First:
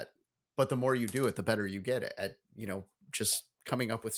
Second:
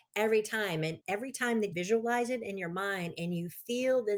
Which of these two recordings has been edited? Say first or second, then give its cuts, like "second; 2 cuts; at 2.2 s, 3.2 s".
second; 2 cuts; at 1.0 s, 1.7 s